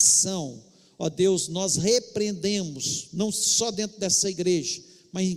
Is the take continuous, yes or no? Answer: yes